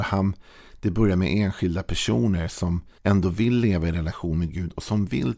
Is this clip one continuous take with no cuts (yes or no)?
no